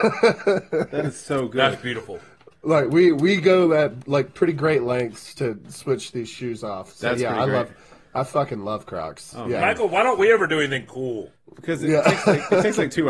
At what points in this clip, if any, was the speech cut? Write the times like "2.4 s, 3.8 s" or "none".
none